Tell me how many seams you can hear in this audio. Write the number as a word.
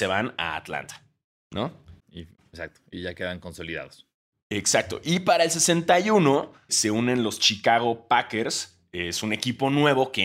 two